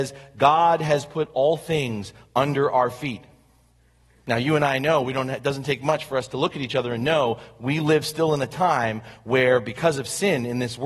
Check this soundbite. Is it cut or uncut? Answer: uncut